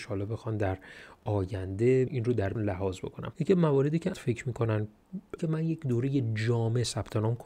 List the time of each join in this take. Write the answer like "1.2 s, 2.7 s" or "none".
2.1 s, 2.6 s, 3.3 s, 4.1 s, 5.4 s